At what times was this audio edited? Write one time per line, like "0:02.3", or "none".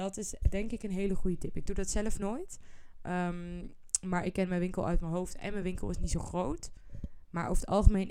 none

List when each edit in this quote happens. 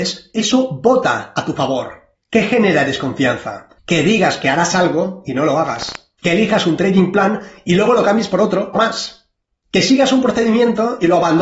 0:03.8
0:06.2
0:08.7

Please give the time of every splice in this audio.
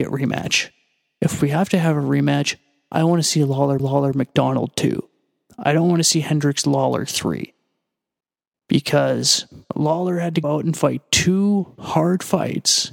0:03.8
0:10.4

